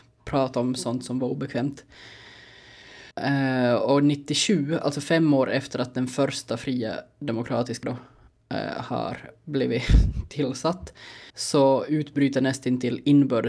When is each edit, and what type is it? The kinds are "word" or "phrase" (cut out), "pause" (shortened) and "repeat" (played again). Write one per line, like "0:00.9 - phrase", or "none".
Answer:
0:03.1 - pause
0:07.8 - word
0:11.3 - pause

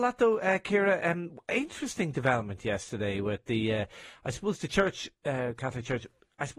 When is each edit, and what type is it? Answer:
0:05.1 - pause

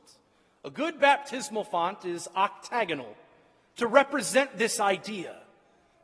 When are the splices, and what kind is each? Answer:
none

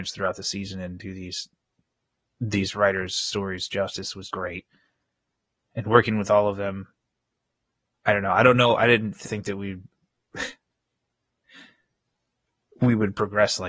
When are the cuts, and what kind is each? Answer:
0:04.3 - word
0:09.3 - word

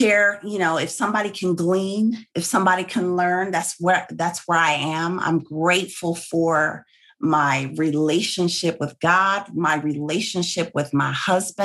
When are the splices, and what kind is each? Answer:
none

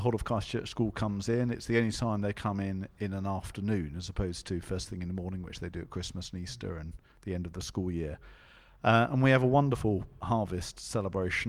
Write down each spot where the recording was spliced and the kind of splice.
none

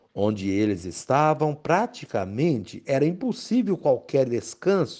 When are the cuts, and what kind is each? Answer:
none

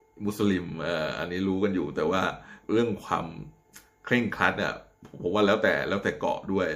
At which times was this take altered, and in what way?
0:02.6 - pause

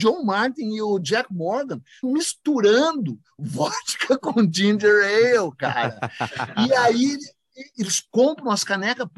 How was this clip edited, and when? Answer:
0:02.0 - word
0:07.7 - word

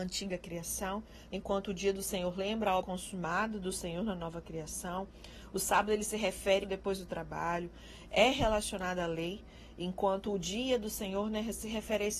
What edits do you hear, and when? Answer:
0:01.3 - word
0:02.8 - word
0:06.6 - phrase

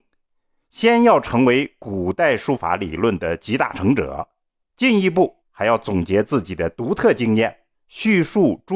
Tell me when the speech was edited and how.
0:04.6 - pause
0:05.4 - pause
0:07.7 - pause

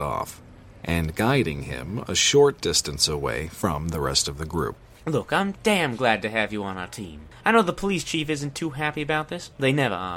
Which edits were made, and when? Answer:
none

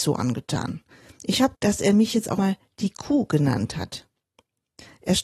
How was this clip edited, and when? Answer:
0:01.5 - word
0:02.4 - word

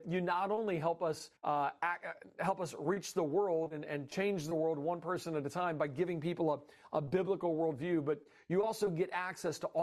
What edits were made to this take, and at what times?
0:01.4 - pause

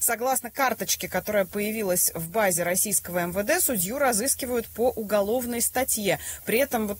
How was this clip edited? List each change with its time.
none

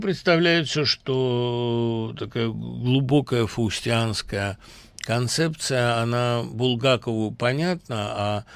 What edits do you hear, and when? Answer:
none

